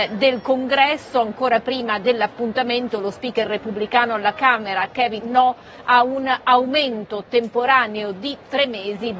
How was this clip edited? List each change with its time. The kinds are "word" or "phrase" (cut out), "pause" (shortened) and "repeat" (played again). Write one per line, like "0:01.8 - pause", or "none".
0:05.2 - phrase